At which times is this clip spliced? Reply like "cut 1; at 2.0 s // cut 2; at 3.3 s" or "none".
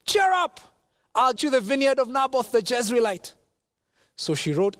cut 1; at 1.4 s